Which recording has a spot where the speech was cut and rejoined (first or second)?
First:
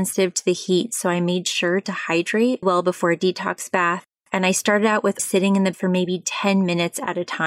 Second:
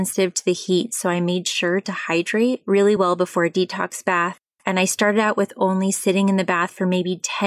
first